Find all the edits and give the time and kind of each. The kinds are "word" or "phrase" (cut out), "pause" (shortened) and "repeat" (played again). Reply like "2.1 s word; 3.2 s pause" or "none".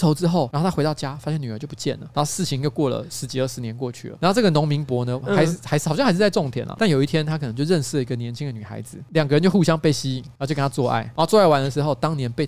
none